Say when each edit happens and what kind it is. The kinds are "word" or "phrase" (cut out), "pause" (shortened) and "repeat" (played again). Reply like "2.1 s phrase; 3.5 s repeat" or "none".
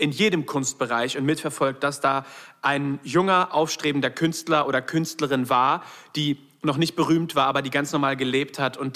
none